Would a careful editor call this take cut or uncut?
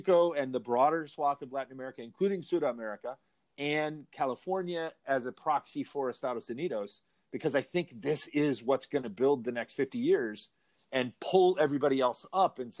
uncut